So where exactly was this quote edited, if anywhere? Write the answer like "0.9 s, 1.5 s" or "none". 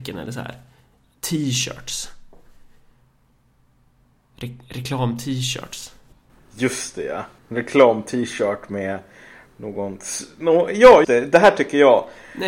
6.1 s, 7.4 s, 11.0 s